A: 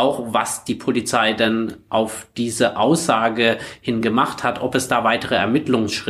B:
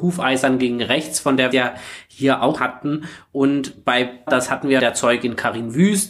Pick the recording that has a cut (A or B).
B